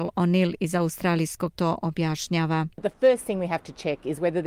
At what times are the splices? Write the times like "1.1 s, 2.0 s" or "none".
1.5 s